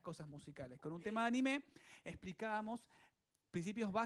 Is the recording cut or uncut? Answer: uncut